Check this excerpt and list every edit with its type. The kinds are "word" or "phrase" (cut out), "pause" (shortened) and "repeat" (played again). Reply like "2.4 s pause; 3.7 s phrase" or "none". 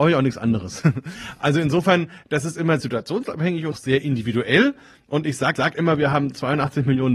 2.8 s word; 3.7 s phrase; 5.6 s repeat